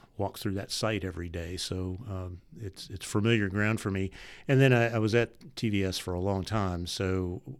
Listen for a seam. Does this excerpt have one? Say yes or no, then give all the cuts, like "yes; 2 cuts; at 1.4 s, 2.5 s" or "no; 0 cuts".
no; 0 cuts